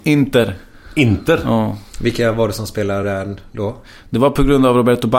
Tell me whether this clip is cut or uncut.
uncut